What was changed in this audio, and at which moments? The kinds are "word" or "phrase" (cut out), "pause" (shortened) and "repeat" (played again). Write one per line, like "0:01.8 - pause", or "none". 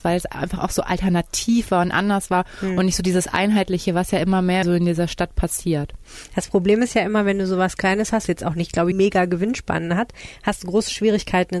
0:04.6 - word
0:08.3 - word
0:08.9 - phrase